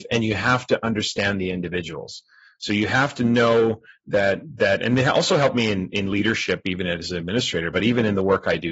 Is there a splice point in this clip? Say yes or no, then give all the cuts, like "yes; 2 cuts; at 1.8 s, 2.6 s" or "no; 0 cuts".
no; 0 cuts